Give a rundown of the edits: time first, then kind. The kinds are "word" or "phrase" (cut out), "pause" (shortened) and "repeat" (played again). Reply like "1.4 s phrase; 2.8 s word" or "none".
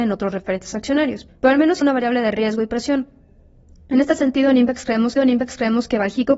1.3 s pause; 1.8 s word; 5.2 s repeat

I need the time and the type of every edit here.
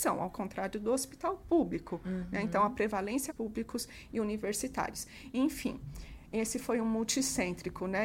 3.3 s phrase; 6.3 s word

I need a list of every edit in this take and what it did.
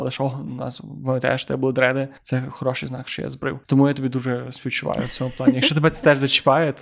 2.2 s pause; 3.6 s pause

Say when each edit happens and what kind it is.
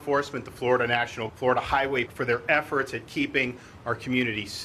1.3 s word; 2.1 s phrase

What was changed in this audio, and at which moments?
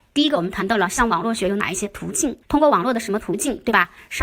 2.4 s pause

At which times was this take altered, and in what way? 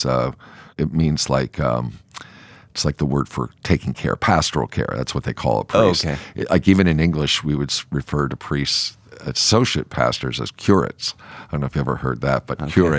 none

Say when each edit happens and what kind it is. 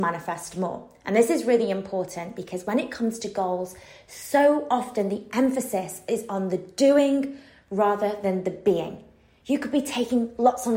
none

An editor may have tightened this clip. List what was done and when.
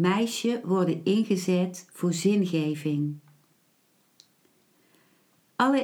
none

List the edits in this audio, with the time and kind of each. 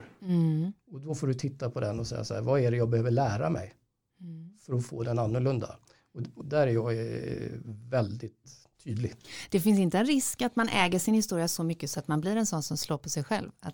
6.4 s word

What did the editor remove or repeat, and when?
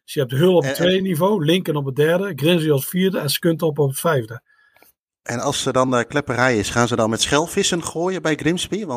none

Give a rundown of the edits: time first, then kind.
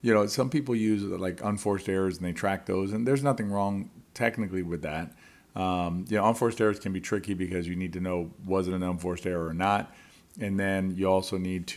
none

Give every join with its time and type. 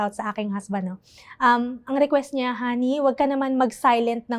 none

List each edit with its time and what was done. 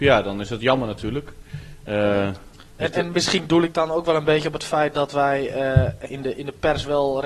6.1 s word

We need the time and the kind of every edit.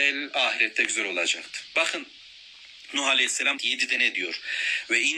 3.6 s word

